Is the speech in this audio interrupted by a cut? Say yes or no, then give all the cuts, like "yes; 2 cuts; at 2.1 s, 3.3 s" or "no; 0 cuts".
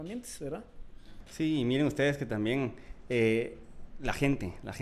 no; 0 cuts